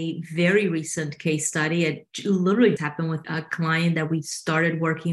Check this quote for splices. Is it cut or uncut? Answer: cut